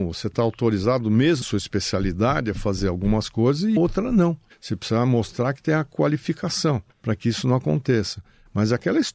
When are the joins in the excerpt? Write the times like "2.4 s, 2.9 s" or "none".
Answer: 1.4 s, 3.8 s, 4.5 s, 6.9 s